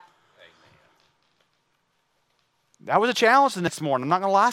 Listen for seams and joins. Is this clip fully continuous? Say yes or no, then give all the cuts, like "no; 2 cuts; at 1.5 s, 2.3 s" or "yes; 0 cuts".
yes; 0 cuts